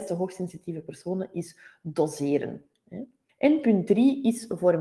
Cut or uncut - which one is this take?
cut